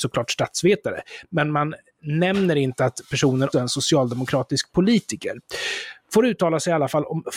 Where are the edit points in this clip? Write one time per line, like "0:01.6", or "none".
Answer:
0:03.5